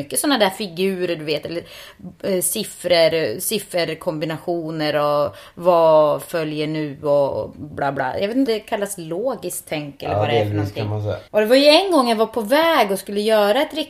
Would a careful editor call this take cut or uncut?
cut